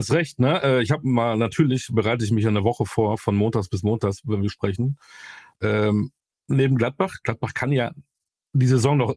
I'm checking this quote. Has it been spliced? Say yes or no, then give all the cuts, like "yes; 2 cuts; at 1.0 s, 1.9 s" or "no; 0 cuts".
yes; 1 cut; at 6.2 s